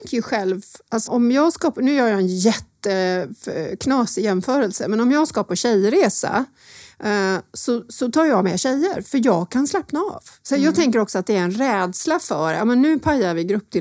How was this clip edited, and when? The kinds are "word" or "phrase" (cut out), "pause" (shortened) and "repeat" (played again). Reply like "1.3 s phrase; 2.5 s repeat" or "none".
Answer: 1.1 s word